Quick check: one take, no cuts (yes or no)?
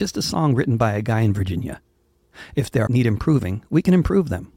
no